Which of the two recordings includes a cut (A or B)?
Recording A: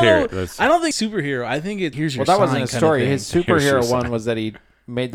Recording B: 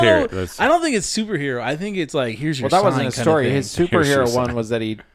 A